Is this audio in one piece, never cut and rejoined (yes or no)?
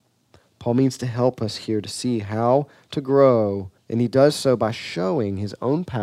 no